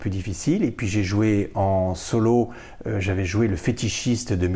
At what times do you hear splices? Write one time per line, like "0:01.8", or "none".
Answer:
none